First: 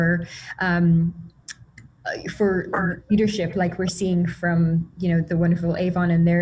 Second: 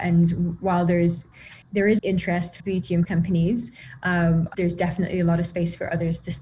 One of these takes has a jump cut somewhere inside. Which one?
second; 5 cuts; at 1.6 s, 2.0 s, 2.6 s, 3.0 s, 4.5 s

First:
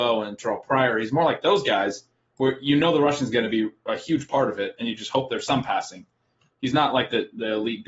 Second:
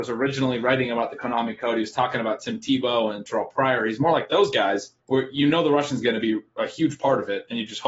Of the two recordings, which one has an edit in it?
second; 1 cut; at 5.0 s

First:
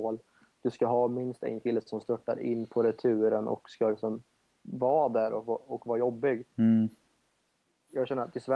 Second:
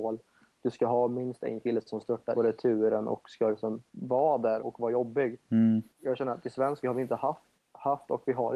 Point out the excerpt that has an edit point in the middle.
second; 6 cuts; at 2.3 s, 3.9 s, 4.6 s, 5.9 s, 6.8 s, 7.6 s

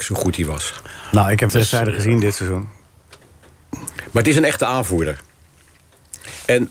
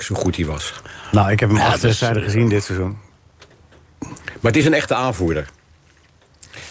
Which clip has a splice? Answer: first; 1 cut; at 1.5 s

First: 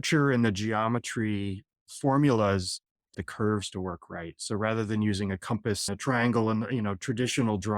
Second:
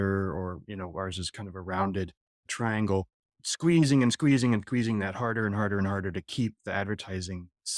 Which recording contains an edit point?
first; 2 cuts; at 3.1 s, 5.9 s

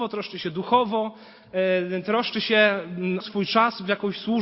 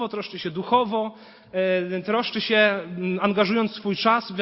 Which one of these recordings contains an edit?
first; 1 cut; at 3.2 s

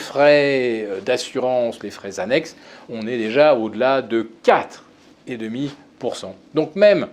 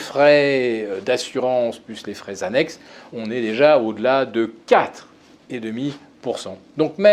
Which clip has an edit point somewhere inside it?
first; 1 cut; at 1.8 s

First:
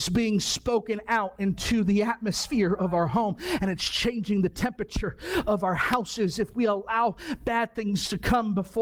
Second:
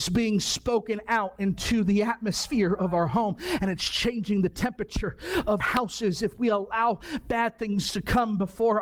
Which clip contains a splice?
second; 1 cut; at 5.6 s

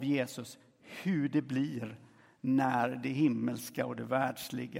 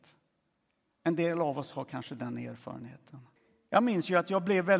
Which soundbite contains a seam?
second; 1 cut; at 3.4 s

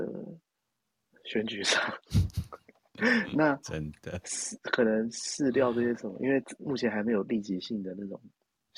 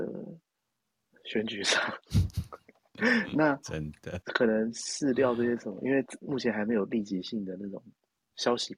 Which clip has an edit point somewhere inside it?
second; 1 cut; at 4.2 s

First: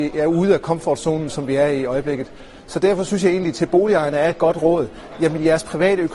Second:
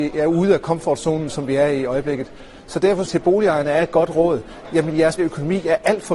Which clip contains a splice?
second; 2 cuts; at 3.0 s, 5.2 s

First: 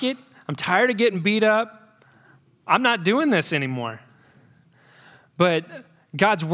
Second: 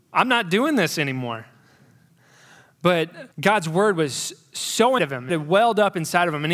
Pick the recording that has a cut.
second; 3 cuts; at 3.3 s, 5.0 s, 5.3 s

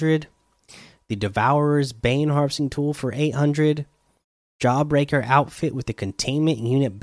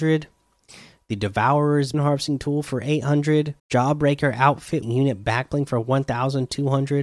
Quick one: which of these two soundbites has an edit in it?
second; 3 cuts; at 1.9 s, 3.6 s, 4.8 s

